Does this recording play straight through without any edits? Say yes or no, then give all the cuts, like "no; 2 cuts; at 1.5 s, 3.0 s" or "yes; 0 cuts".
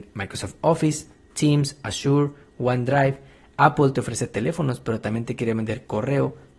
yes; 0 cuts